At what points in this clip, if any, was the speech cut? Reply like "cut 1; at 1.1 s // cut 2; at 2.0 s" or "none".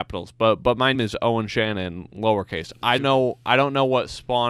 cut 1; at 0.9 s // cut 2; at 3.0 s